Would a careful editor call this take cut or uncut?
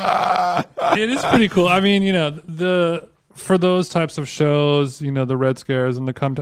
uncut